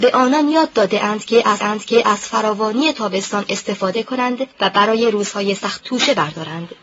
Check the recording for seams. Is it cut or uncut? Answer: cut